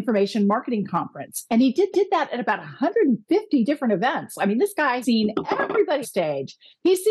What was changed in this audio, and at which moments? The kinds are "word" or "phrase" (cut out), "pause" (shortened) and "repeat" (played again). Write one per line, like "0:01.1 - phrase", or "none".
0:01.9 - repeat
0:05.0 - word
0:06.0 - word